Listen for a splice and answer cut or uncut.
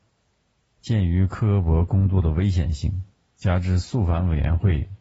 uncut